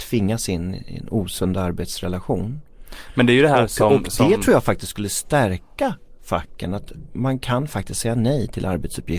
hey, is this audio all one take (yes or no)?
yes